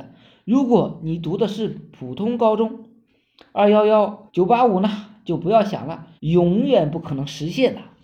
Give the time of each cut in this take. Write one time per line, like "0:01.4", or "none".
0:04.3
0:06.2